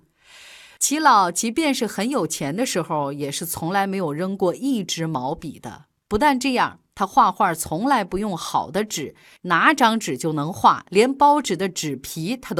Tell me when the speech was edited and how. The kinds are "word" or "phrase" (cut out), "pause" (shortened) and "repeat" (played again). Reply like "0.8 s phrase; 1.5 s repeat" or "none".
none